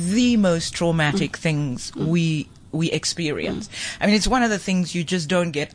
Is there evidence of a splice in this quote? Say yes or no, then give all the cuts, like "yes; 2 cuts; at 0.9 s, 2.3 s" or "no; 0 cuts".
no; 0 cuts